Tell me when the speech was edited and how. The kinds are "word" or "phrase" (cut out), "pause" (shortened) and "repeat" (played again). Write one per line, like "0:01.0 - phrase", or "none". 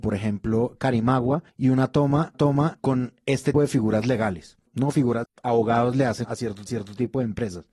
0:01.5 - pause
0:02.3 - repeat
0:03.5 - word
0:04.7 - pause
0:05.2 - phrase
0:06.2 - word
0:06.7 - repeat